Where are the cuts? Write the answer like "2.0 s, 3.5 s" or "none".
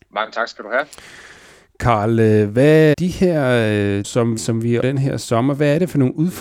2.9 s, 4.0 s, 4.4 s, 4.8 s